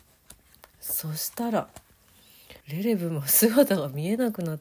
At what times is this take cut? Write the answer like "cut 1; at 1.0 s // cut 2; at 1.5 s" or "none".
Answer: cut 1; at 2.6 s